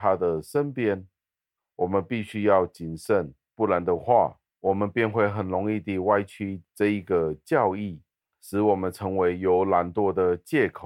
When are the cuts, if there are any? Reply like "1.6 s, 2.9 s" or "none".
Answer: none